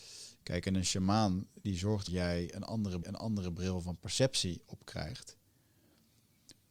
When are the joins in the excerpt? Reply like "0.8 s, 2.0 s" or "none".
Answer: 2.1 s, 3.0 s